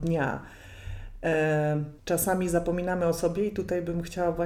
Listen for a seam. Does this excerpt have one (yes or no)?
yes